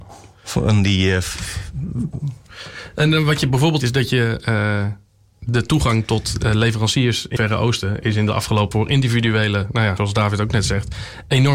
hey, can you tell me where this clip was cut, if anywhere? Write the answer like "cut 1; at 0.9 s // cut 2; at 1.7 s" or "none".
cut 1; at 3.8 s // cut 2; at 7.4 s // cut 3; at 8.7 s // cut 4; at 10.0 s